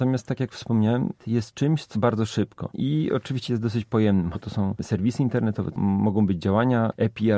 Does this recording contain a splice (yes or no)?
yes